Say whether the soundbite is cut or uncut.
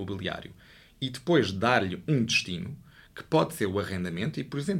uncut